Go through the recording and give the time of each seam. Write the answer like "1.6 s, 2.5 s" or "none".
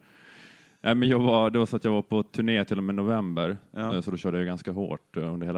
none